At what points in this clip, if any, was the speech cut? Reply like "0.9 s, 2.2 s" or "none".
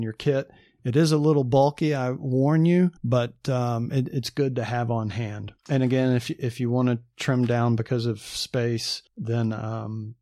3.0 s, 5.6 s, 9.1 s